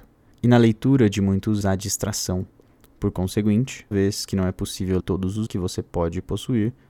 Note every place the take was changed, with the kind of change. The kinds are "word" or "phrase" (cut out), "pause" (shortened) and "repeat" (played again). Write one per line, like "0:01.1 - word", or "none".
0:01.6 - word
0:03.9 - word
0:05.0 - word
0:05.5 - word